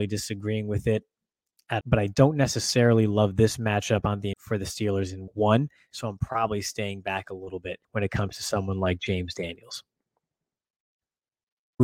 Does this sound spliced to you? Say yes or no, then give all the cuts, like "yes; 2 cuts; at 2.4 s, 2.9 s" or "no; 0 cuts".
yes; 4 cuts; at 1.8 s, 4.3 s, 5.3 s, 7.8 s